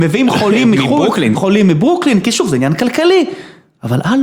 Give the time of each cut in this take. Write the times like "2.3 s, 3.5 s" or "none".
1.3 s